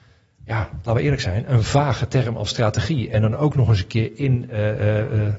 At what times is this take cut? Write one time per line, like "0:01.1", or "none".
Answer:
none

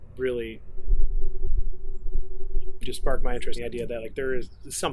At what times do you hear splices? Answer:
0:02.8
0:03.5

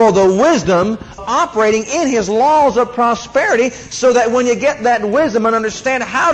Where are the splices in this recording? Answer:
0:01.2

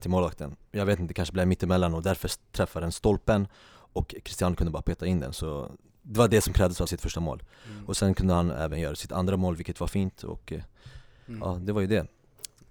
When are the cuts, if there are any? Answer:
0:05.8
0:06.9

